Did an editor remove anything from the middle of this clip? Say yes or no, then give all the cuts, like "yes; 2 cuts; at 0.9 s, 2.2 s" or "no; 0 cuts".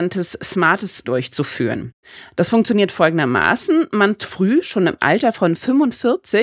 yes; 2 cuts; at 1.0 s, 4.2 s